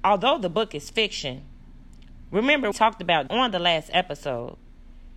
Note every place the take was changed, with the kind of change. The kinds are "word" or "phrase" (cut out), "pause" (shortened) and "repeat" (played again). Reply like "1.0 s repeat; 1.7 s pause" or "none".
2.7 s word; 3.3 s word